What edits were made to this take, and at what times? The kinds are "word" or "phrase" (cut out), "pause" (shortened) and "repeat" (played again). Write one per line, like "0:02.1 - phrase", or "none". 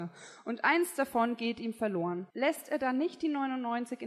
0:02.3 - pause